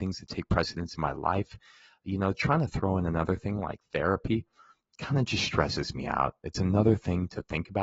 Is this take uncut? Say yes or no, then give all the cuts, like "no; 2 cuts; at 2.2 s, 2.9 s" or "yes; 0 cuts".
yes; 0 cuts